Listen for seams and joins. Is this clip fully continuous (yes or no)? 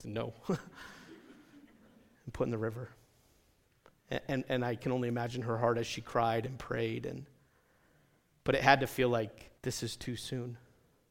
no